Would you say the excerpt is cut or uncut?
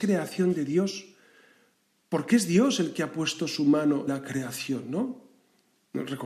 cut